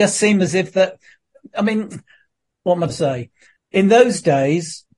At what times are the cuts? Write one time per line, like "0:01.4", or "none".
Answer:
0:02.9
0:03.6